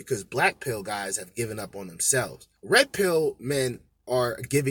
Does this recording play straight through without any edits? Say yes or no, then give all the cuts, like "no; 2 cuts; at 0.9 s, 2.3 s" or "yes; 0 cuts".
no; 1 cut; at 2.6 s